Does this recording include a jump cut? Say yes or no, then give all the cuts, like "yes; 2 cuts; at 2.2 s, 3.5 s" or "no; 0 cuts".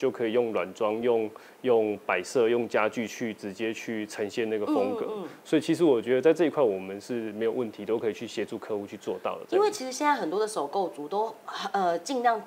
no; 0 cuts